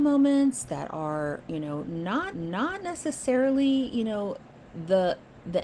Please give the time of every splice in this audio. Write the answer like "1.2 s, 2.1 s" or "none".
2.3 s